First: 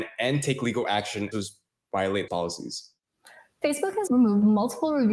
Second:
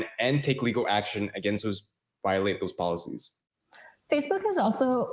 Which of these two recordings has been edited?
first; 3 cuts; at 1.3 s, 2.3 s, 4.1 s

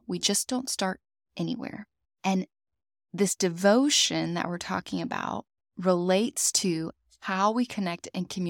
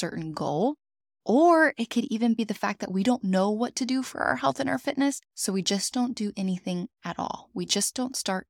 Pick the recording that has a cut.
second; 2 cuts; at 1.0 s, 5.2 s

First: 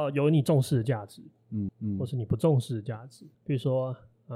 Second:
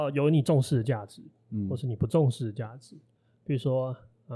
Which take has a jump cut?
first; 2 cuts; at 1.7 s, 3.3 s

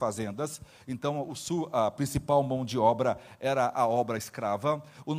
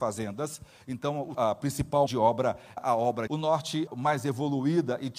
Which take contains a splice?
second; 5 cuts; at 1.3 s, 2.1 s, 2.8 s, 3.3 s, 3.9 s

